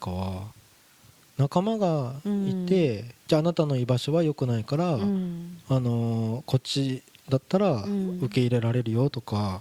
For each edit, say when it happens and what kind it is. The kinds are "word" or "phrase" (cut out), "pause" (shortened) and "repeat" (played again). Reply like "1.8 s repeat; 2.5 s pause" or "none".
3.2 s pause